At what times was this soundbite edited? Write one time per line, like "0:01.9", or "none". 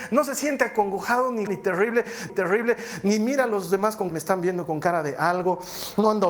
0:01.5
0:02.3
0:04.1